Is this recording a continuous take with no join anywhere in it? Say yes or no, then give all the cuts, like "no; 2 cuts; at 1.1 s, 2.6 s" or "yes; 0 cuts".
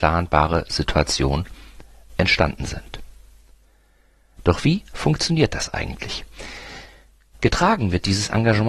yes; 0 cuts